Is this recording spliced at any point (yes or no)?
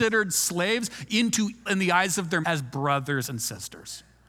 yes